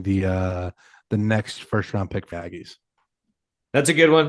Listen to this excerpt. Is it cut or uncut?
cut